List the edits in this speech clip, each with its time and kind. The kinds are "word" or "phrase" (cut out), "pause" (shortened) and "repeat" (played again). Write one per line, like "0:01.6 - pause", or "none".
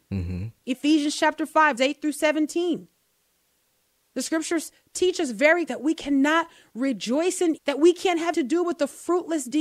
0:01.8 - word
0:05.7 - word
0:07.6 - word
0:08.3 - word

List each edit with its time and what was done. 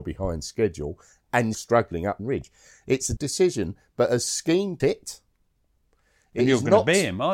0:01.5 - word
0:02.2 - word
0:03.2 - word
0:04.8 - word

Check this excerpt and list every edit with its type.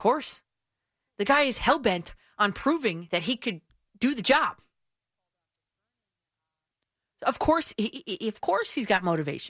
none

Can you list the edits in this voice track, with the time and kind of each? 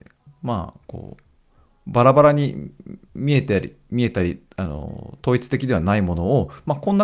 none

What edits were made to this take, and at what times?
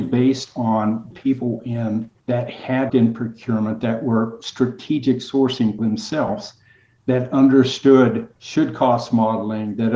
0:01.1 - word
0:02.2 - pause
0:02.9 - word
0:05.8 - word
0:08.4 - pause

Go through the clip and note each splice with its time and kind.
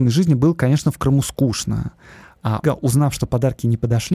0:02.6 - word

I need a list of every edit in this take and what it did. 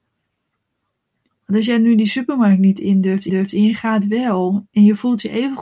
0:03.3 - repeat

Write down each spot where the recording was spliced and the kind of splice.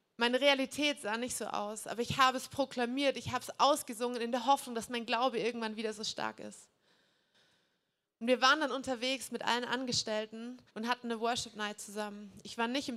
0:10.7 - pause

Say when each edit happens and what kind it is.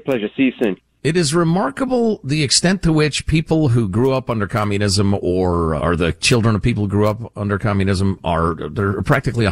0:05.8 - word

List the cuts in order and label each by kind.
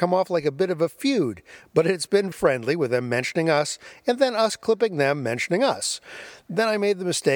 0:02.3 - word

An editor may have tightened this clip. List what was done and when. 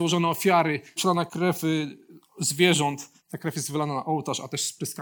0:01.0 - word
0:01.3 - word
0:03.2 - pause

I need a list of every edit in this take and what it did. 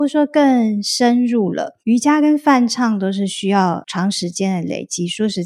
0:01.8 - pause

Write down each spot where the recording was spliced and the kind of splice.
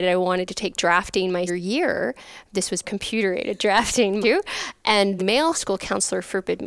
0:01.5 - word
0:02.8 - word
0:04.2 - word
0:05.2 - word
0:05.5 - word

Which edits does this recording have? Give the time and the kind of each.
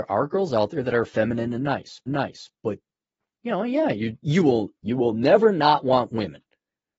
0:02.1 - repeat
0:04.2 - word

